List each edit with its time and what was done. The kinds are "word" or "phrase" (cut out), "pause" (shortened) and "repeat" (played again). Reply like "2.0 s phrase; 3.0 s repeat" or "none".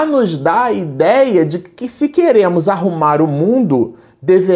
none